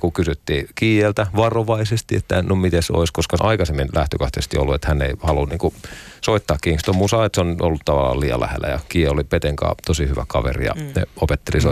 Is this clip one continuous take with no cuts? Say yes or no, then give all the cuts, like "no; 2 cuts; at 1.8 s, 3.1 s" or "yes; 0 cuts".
no; 1 cut; at 3.4 s